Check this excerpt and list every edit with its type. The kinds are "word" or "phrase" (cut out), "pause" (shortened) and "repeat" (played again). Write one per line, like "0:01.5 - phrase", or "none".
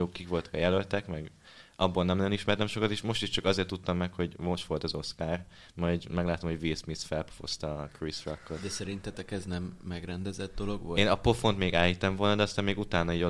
none